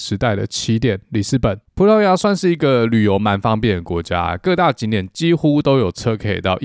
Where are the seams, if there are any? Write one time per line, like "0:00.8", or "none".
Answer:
0:01.7